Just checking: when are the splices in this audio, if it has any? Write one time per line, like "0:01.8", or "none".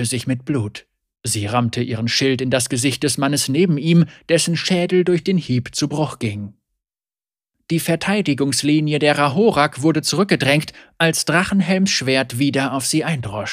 none